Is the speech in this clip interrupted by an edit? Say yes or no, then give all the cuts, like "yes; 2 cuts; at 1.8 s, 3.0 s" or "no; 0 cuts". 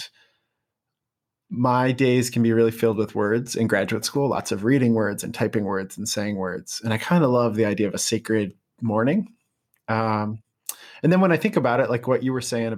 no; 0 cuts